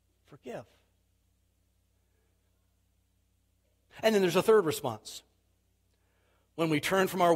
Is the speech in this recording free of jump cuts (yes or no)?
yes